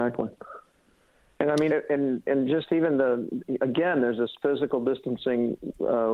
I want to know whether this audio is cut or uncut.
cut